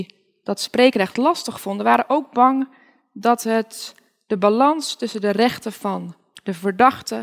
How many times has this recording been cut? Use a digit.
0